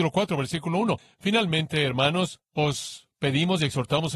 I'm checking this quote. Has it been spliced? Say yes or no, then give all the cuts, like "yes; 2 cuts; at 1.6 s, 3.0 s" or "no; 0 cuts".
no; 0 cuts